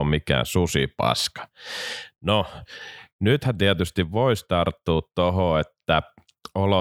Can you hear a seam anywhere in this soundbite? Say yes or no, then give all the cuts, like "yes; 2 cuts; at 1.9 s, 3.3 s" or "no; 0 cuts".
no; 0 cuts